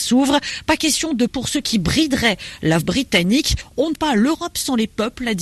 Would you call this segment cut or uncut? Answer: cut